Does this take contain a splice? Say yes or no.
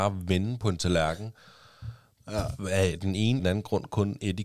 yes